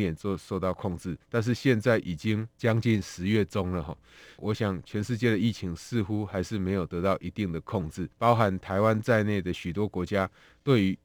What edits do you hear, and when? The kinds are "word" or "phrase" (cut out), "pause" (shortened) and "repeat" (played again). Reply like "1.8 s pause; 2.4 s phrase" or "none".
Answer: 1.2 s pause; 2.5 s pause; 8.1 s pause